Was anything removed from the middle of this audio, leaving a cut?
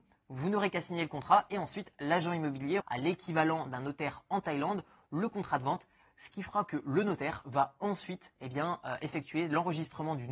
yes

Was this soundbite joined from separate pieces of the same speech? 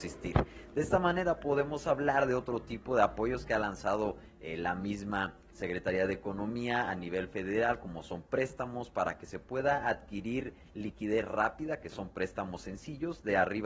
no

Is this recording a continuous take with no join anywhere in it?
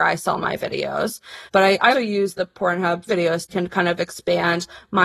no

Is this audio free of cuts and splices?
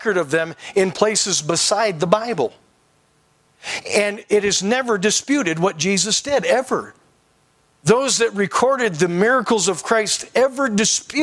yes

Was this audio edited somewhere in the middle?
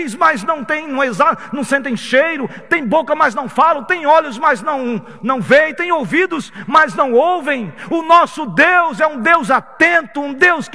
no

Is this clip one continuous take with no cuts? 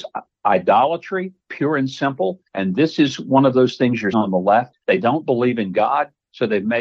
no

